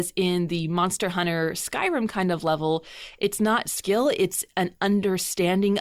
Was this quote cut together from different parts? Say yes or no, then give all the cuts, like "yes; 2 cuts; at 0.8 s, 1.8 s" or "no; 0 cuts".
yes; 1 cut; at 3.6 s